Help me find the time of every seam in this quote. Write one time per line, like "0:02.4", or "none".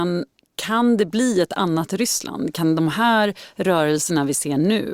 none